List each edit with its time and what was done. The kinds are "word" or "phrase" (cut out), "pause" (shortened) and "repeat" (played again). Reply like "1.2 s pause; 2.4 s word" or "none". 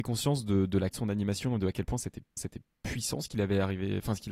0.9 s word; 2.4 s repeat